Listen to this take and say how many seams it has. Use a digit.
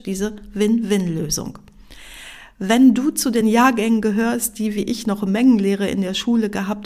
0